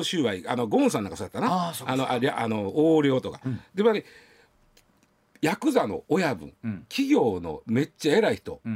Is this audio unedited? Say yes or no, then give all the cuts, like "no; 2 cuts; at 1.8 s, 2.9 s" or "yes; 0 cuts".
yes; 0 cuts